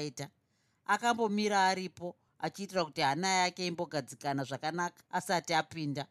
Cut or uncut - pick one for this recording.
uncut